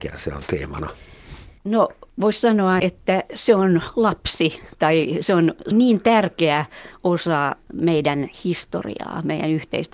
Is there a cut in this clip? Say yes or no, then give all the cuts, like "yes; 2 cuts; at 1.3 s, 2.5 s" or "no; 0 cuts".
yes; 4 cuts; at 1.6 s, 2.8 s, 4.7 s, 5.7 s